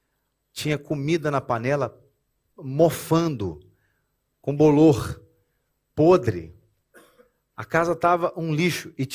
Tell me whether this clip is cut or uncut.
uncut